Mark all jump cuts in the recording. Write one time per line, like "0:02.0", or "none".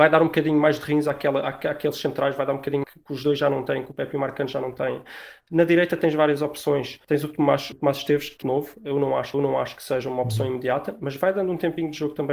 0:02.8
0:07.7
0:08.4
0:09.3